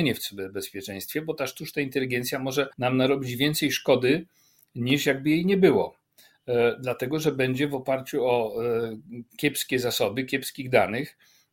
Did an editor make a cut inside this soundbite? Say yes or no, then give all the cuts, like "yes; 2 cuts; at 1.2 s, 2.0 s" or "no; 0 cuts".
yes; 1 cut; at 2.7 s